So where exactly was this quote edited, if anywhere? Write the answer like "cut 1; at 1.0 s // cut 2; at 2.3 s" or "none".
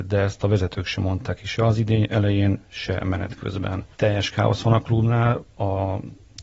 cut 1; at 3.9 s // cut 2; at 5.5 s